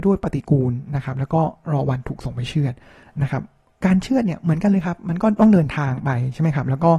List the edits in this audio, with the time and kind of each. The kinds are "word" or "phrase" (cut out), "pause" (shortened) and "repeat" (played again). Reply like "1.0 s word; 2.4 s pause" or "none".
none